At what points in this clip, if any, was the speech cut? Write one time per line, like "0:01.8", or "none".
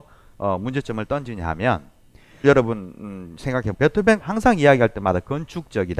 0:02.4
0:03.7
0:04.2